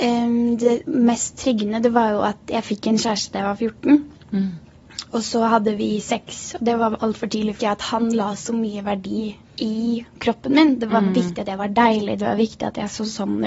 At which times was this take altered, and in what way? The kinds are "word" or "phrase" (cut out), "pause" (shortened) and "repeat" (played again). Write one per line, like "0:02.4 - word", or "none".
0:07.0 - word
0:07.6 - phrase
0:09.4 - pause

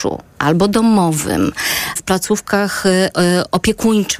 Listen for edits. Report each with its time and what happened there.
0:02.0 - word

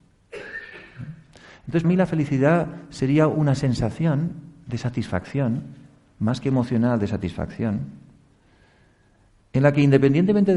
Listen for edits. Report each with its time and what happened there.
0:01.8 - word

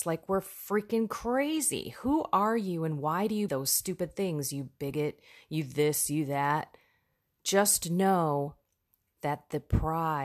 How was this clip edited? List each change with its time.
0:03.5 - word

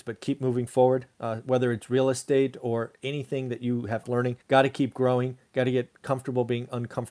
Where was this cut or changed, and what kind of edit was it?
0:04.0 - phrase
0:04.4 - pause

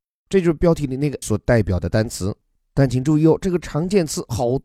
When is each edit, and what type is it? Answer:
0:01.2 - word

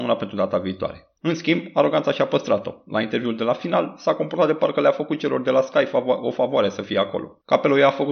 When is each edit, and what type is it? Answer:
0:01.2 - pause

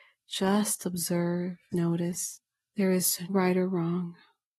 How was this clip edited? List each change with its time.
0:01.7 - word
0:03.3 - word

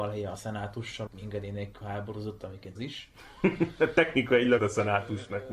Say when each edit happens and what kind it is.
0:01.1 - word
0:02.8 - word
0:04.6 - phrase

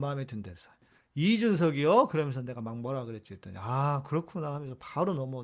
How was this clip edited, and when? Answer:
none

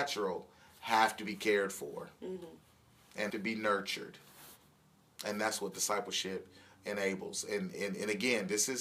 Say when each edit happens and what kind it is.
0:03.3 - word
0:07.7 - word

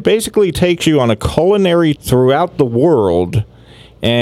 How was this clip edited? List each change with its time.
0:02.0 - word

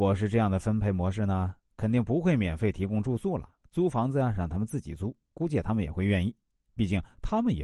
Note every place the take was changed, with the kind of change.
0:03.6 - pause
0:05.2 - pause

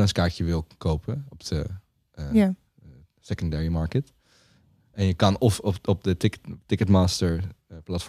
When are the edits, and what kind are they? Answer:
none

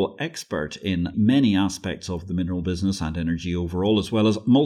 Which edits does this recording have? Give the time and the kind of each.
0:01.1 - word

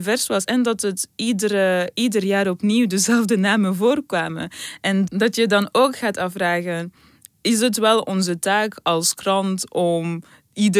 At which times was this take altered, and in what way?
none

